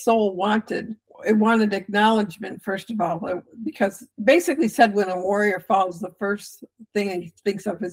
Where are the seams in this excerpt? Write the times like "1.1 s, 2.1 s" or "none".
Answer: 1.1 s, 4.1 s